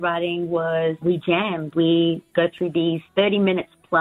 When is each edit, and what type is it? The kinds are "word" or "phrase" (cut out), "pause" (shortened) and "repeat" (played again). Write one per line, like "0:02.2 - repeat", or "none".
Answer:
0:01.0 - word
0:01.7 - word
0:02.3 - word

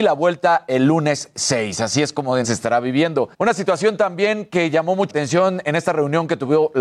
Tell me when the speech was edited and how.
0:02.4 - word
0:03.3 - pause
0:05.1 - word

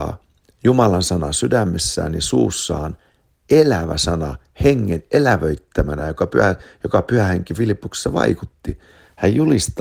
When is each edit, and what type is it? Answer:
none

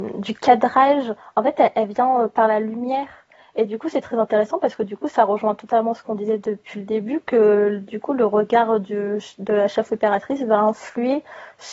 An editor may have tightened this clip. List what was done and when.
none

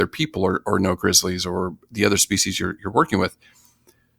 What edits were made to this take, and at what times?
none

